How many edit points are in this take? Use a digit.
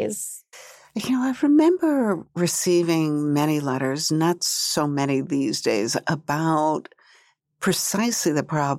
0